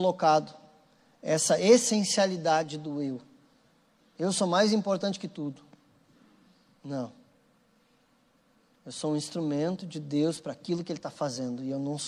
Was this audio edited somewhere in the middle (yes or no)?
no